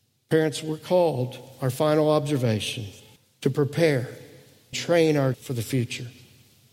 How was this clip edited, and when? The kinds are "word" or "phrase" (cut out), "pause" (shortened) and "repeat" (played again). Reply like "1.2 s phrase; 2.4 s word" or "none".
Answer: 3.2 s pause; 4.7 s word; 5.3 s word